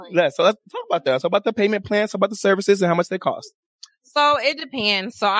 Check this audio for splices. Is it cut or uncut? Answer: uncut